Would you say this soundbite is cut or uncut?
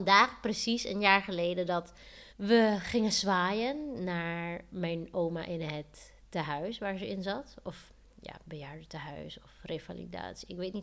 cut